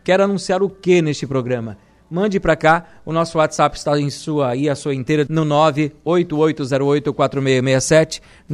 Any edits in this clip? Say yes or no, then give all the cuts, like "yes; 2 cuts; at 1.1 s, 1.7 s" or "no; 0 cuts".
yes; 1 cut; at 5.3 s